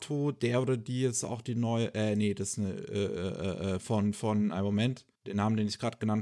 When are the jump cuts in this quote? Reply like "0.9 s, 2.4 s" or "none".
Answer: 5.1 s